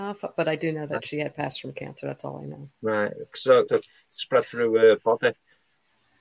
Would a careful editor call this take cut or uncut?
cut